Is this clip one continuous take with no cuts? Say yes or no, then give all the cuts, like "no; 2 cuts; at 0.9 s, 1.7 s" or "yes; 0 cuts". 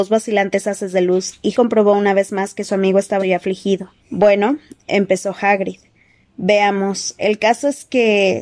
no; 3 cuts; at 1.5 s, 3.2 s, 4.0 s